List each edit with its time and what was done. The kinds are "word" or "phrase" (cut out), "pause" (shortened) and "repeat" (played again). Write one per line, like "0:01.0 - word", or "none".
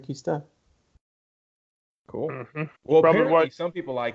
0:02.8 - pause